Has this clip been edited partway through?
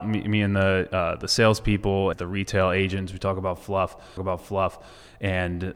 yes; 2 cuts; at 2.1 s, 4.2 s

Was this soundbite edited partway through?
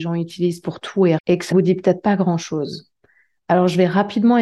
yes; 2 cuts; at 1.2 s, 1.5 s

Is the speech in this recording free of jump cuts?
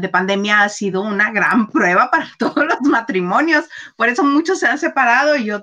yes; 0 cuts

